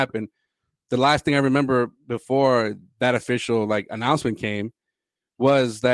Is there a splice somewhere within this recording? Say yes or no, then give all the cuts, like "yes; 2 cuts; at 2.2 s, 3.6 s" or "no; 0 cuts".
no; 0 cuts